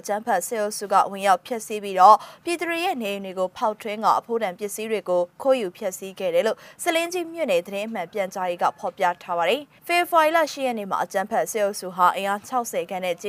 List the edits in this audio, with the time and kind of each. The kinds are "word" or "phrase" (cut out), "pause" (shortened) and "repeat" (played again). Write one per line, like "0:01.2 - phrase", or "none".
0:09.8 - pause